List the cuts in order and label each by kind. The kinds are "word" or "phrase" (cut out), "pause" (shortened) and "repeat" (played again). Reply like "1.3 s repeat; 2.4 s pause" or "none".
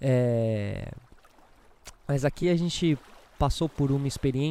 none